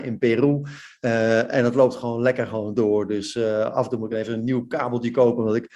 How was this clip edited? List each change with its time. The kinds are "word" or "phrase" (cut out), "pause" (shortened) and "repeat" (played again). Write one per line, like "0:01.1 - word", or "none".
none